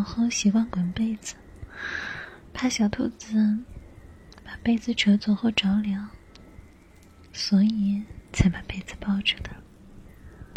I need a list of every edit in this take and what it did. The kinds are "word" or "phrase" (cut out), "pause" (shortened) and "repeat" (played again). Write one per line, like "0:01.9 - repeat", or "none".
0:08.3 - pause

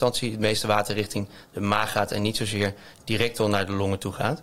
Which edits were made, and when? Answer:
none

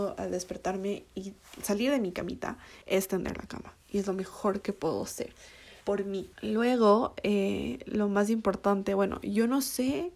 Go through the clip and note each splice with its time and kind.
0:02.8 - pause
0:05.8 - pause
0:06.3 - pause

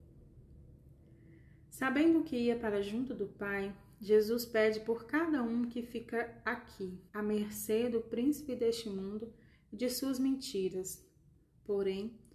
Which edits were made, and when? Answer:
0:07.1 - pause

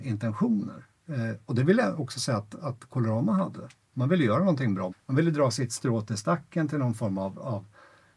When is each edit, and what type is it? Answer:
0:04.9 - phrase

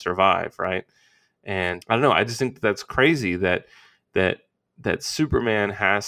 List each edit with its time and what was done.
0:01.8 - word

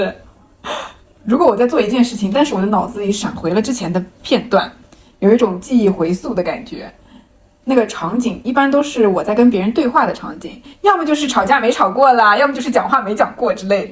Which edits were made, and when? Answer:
none

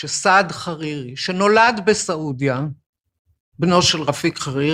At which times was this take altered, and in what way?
none

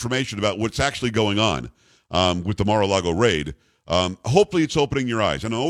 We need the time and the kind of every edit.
none

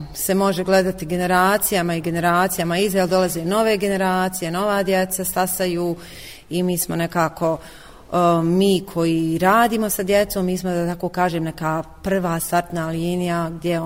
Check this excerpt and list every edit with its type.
none

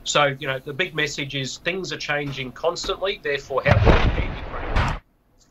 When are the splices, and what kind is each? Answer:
none

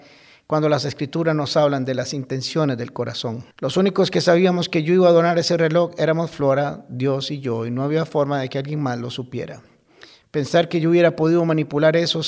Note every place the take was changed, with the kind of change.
0:03.5 - pause

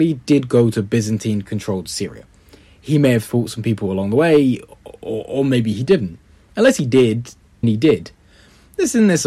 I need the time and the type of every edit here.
0:07.6 - word

